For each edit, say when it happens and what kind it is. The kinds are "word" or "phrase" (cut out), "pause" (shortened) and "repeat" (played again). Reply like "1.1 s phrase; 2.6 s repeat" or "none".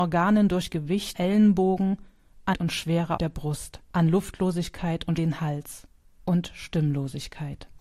1.1 s word; 2.5 s word; 3.2 s word; 3.8 s pause; 5.2 s phrase